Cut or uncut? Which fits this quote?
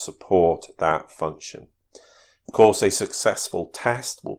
uncut